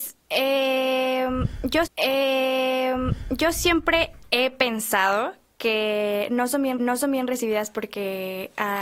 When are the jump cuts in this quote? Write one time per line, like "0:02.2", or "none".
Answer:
0:01.9
0:06.8